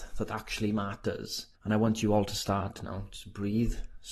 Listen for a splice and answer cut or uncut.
cut